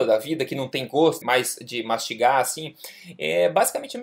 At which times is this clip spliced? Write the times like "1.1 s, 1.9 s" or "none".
1.2 s